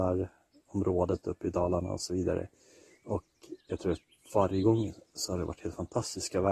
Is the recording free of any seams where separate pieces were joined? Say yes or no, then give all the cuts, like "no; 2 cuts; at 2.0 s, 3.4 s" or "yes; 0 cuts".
no; 2 cuts; at 3.6 s, 4.1 s